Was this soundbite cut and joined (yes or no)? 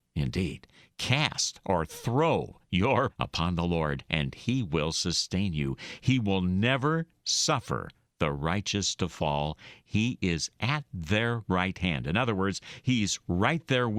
yes